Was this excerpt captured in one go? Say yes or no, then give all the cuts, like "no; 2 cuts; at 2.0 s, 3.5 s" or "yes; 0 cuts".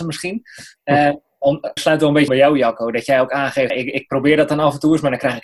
no; 3 cuts; at 1.8 s, 2.3 s, 3.7 s